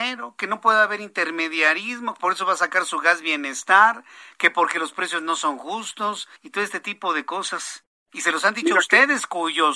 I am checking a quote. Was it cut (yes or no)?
yes